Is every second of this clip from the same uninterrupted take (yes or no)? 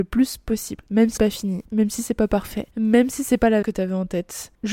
no